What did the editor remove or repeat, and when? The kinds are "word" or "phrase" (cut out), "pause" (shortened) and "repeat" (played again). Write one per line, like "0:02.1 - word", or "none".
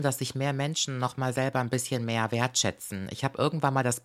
none